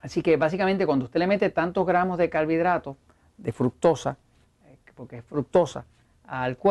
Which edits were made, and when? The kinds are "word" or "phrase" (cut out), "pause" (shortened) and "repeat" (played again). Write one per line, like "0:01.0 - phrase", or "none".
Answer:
none

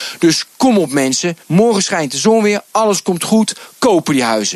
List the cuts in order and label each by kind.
0:01.4 - pause

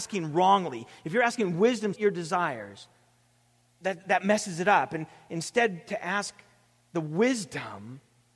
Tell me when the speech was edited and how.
0:02.0 - word

